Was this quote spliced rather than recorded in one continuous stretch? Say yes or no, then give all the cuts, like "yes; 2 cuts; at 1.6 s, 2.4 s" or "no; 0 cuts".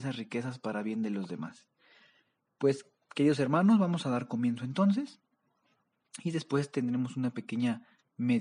no; 0 cuts